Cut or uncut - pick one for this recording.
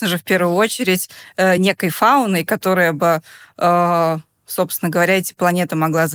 uncut